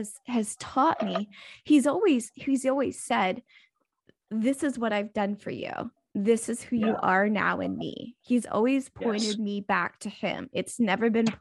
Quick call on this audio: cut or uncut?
uncut